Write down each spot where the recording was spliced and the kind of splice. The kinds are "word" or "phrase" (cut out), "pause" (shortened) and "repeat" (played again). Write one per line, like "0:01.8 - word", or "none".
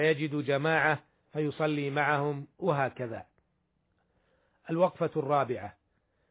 none